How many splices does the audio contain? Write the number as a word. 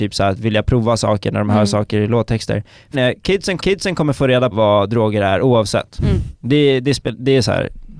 three